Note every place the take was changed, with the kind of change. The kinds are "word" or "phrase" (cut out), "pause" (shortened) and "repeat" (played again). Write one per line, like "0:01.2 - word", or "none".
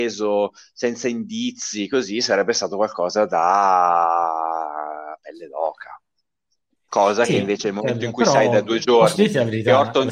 none